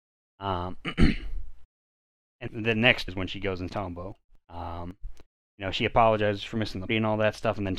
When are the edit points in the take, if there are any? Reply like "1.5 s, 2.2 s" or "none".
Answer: 2.5 s, 3.1 s, 3.7 s, 5.4 s, 6.9 s